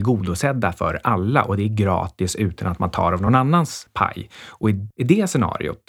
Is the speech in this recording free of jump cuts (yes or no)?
yes